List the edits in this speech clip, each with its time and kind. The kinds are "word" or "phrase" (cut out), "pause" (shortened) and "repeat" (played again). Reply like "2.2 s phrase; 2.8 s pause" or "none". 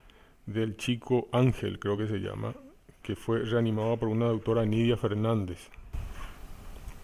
none

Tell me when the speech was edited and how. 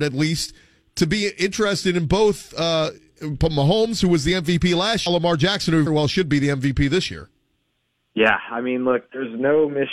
5.1 s phrase; 5.9 s word

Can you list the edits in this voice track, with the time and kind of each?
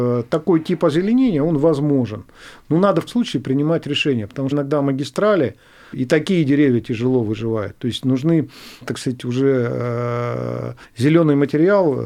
3.1 s word; 4.5 s phrase; 5.9 s word; 8.8 s word; 10.8 s pause

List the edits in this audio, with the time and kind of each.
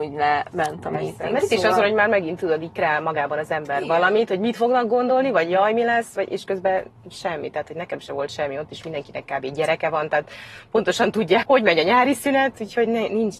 11.4 s word

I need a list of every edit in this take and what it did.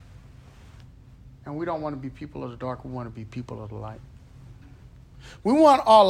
none

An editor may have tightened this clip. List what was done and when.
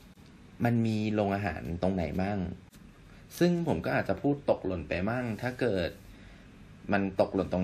none

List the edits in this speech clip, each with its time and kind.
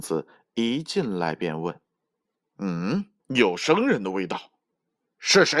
1.8 s pause; 3.2 s pause

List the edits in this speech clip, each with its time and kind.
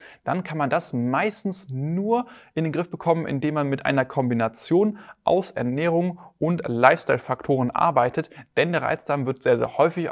none

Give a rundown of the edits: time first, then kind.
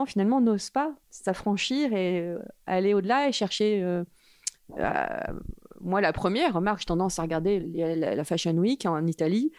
1.0 s pause; 7.6 s word

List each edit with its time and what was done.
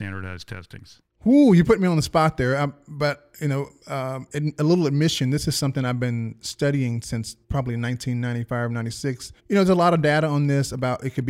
7.4 s pause; 9.4 s pause

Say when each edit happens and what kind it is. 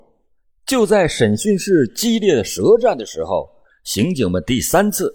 none

